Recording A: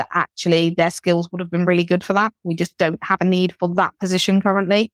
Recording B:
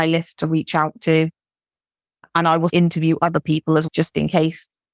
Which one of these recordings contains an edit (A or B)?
B